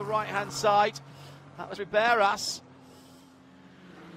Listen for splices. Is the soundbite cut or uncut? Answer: cut